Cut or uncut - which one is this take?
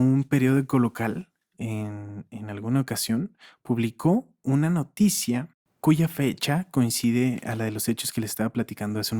uncut